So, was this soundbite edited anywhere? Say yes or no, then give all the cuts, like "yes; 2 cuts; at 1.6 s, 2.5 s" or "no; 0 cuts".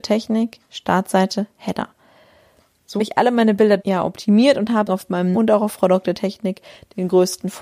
yes; 4 cuts; at 3.0 s, 3.8 s, 4.9 s, 5.3 s